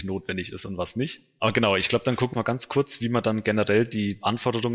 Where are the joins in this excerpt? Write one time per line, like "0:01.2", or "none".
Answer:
0:02.3